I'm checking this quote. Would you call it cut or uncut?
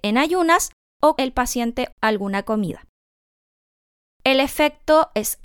cut